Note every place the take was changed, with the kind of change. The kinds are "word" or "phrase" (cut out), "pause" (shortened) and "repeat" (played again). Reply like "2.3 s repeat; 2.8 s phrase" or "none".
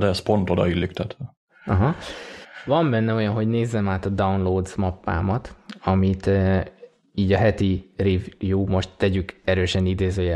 none